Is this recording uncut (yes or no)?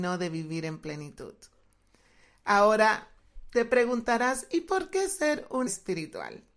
no